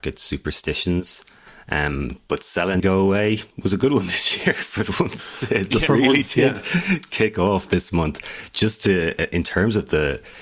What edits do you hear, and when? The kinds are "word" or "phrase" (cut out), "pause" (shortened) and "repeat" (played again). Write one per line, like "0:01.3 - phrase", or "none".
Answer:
0:02.8 - word
0:03.5 - pause
0:05.9 - word